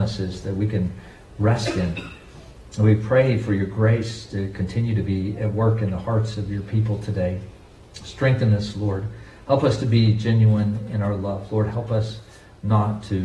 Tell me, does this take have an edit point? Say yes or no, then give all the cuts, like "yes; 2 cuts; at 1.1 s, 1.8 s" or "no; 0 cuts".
no; 0 cuts